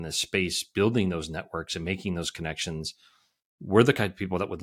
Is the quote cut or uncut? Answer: uncut